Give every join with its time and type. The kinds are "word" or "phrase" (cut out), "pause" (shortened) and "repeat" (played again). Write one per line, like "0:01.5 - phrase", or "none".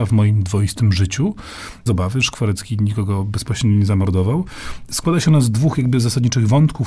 0:01.9 - word